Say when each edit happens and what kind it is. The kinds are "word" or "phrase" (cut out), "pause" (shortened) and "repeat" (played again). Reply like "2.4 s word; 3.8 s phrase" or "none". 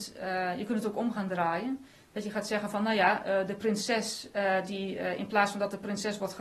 none

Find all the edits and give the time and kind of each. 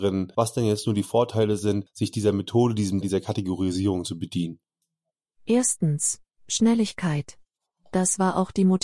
3.0 s word

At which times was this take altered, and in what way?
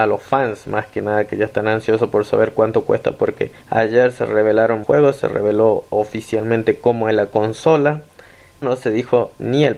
3.6 s pause; 4.8 s word; 5.9 s pause; 8.6 s word

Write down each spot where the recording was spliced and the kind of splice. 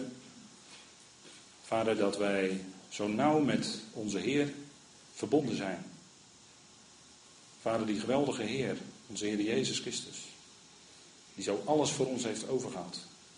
none

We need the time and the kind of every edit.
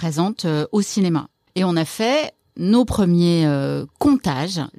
none

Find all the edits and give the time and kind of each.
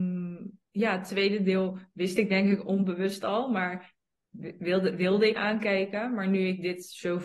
5.4 s word

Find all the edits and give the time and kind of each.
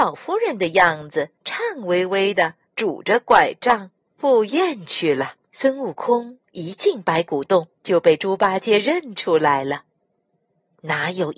1.4 s pause; 2.7 s pause; 5.5 s pause; 6.4 s pause; 7.7 s pause

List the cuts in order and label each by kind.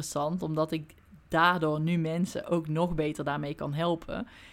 none

